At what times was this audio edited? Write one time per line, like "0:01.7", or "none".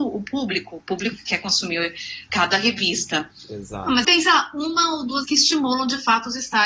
0:02.3
0:04.0
0:05.2

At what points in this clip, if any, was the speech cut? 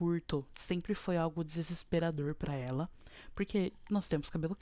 none

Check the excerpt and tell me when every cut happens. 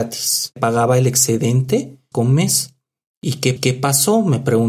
0:02.1
0:03.6

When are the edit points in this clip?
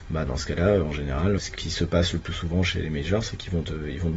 0:01.4

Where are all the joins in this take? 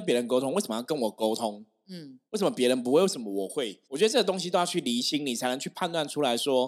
0:02.3
0:03.8

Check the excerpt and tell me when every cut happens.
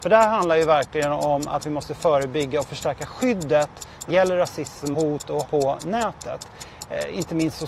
0:04.1
0:04.9
0:05.4

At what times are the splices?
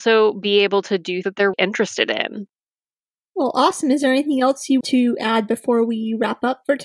0:01.2
0:01.5
0:04.8

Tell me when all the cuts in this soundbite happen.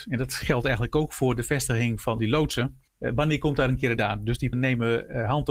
0:02.2
0:02.9
0:04.0
0:04.5

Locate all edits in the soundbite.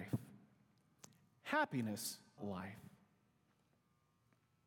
0:02.4

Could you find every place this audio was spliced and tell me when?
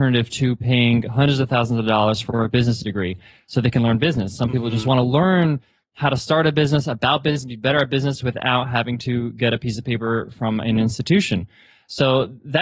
none

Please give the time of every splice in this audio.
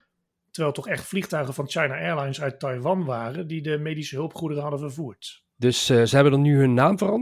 none

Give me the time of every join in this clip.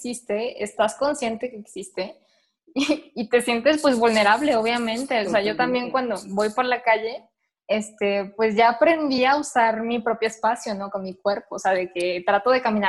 none

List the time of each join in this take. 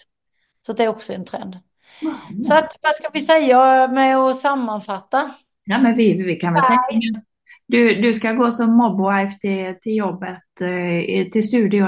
none

